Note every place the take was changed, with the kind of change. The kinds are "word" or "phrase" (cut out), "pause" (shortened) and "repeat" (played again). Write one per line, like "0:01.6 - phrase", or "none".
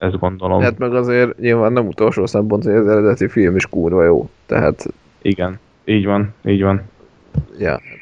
none